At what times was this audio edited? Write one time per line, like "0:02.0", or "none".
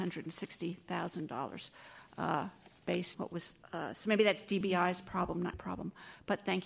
0:03.1
0:05.5